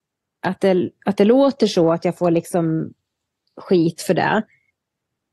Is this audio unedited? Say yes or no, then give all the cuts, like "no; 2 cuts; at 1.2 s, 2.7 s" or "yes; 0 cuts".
yes; 0 cuts